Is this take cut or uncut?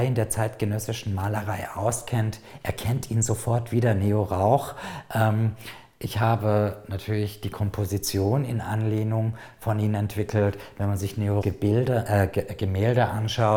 cut